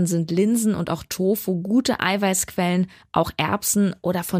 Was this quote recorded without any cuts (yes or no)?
yes